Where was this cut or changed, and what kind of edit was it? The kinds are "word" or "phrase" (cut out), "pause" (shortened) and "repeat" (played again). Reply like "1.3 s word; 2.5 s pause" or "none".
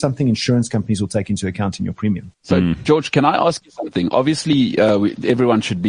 2.3 s pause